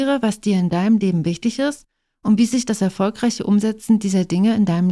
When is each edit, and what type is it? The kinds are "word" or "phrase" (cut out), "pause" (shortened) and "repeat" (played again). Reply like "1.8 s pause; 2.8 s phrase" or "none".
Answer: none